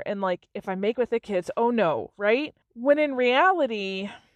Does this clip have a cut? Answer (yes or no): yes